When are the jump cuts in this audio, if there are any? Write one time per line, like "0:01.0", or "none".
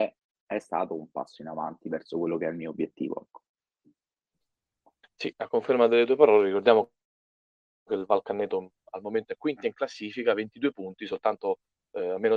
none